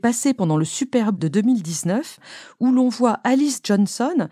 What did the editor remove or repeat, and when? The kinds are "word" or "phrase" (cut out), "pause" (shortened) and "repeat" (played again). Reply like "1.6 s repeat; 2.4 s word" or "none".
1.2 s word